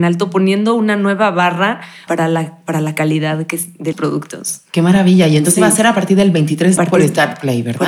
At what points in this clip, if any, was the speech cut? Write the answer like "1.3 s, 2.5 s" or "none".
2.1 s, 3.9 s, 6.8 s